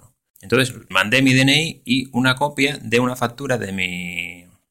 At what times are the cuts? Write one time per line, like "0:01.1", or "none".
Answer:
0:00.9

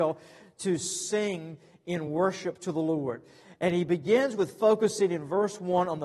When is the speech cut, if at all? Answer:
none

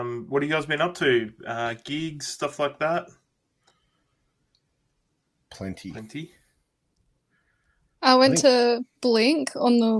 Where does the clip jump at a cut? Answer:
none

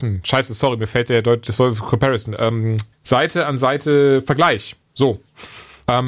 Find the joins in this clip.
0:02.9

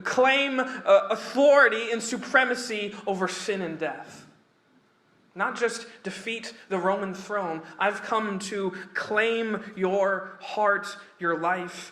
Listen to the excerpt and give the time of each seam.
none

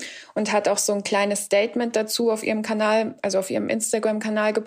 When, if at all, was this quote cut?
none

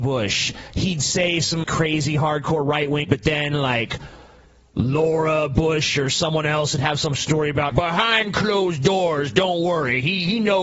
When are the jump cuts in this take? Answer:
0:01.6
0:03.0
0:07.7

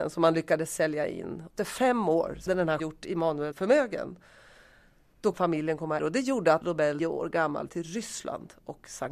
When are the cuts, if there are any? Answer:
0:01.6
0:02.5
0:02.8
0:03.5
0:05.3
0:06.0
0:06.6
0:07.0
0:07.7

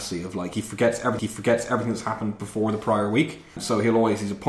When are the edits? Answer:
0:01.2

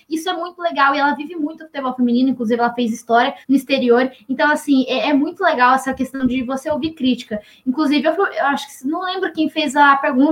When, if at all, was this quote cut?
0:03.4

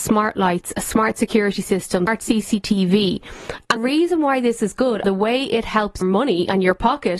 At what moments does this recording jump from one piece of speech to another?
0:02.1
0:03.8
0:05.0
0:06.0

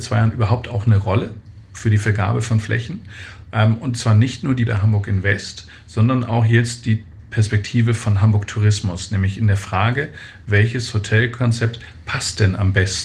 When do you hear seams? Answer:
0:04.7

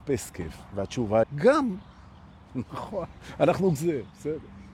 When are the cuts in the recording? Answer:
0:01.2
0:03.8

